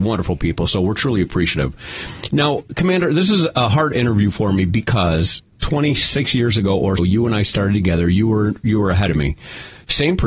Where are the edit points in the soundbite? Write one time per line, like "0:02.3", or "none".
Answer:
0:07.0